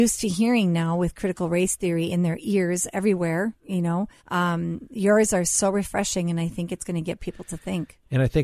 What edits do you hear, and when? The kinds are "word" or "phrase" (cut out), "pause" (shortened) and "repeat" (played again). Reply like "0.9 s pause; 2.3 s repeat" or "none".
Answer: 4.2 s pause